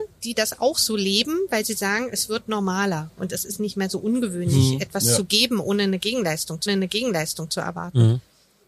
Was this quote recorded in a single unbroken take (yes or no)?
no